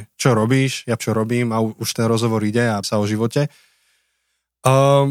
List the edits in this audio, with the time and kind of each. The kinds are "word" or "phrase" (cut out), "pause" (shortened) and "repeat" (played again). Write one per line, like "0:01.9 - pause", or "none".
0:01.0 - word
0:01.9 - word
0:02.8 - word